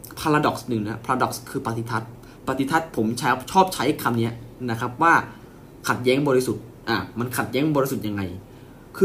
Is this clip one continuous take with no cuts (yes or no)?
no